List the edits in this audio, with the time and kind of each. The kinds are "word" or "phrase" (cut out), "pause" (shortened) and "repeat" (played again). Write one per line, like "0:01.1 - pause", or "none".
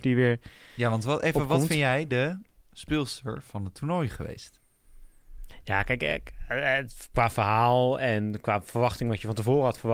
none